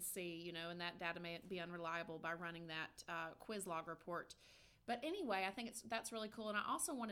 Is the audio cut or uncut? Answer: uncut